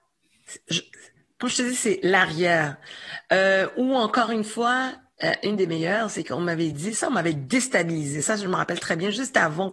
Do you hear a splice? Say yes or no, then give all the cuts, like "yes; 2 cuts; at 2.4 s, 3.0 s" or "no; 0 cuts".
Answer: no; 0 cuts